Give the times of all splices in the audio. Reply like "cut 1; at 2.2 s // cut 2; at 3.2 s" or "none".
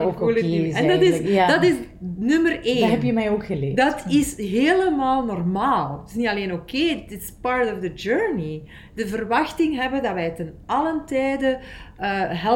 none